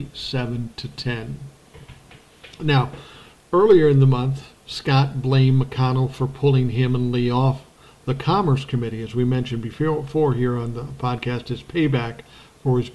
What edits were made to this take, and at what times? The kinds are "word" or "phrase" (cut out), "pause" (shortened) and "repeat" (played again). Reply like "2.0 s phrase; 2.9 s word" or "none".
none